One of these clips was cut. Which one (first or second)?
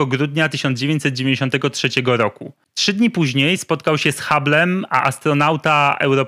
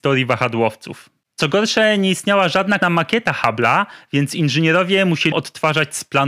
second